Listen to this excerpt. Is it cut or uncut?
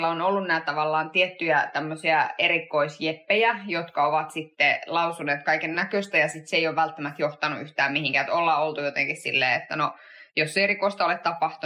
uncut